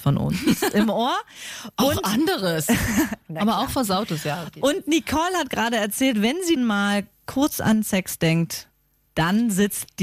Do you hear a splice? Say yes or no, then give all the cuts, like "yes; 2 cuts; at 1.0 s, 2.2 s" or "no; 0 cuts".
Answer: yes; 1 cut; at 6.6 s